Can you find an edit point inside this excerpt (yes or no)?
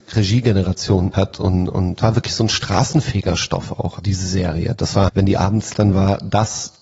yes